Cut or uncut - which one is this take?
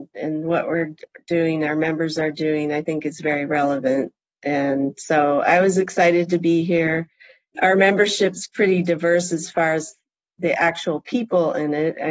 cut